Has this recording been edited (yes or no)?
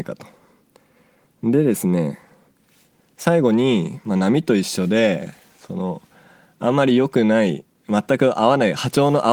no